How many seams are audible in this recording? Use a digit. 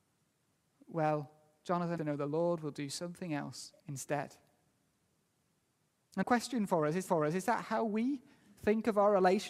4